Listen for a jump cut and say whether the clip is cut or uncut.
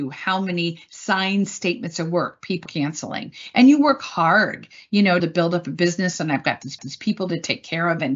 cut